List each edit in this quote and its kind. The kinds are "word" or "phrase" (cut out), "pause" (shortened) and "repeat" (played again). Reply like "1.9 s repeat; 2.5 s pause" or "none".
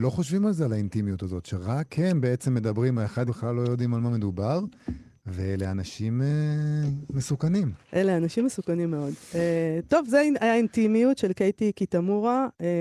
3.3 s phrase